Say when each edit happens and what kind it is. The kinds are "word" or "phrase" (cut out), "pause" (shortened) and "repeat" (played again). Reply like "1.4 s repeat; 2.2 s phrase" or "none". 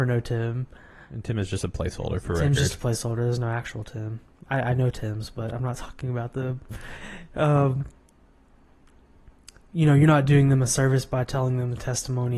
none